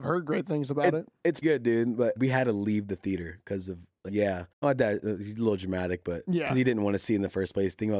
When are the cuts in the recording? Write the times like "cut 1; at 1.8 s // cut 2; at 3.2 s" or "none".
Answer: cut 1; at 1.4 s // cut 2; at 2.2 s // cut 3; at 4.1 s // cut 4; at 4.5 s